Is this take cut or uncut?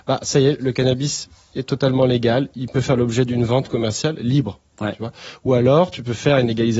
uncut